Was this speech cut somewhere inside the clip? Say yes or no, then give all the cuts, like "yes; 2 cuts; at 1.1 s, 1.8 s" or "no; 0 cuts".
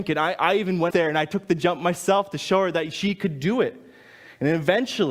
yes; 1 cut; at 0.9 s